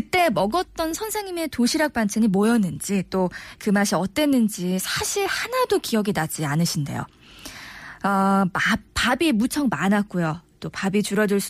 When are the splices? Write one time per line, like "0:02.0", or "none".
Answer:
none